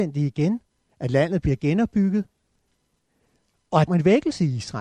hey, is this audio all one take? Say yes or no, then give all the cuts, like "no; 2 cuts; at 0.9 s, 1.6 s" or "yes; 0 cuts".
no; 1 cut; at 3.9 s